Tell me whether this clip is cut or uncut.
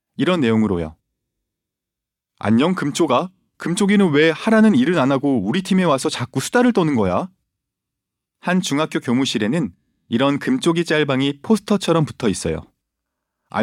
uncut